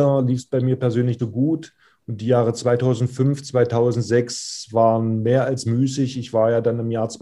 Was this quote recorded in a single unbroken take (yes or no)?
no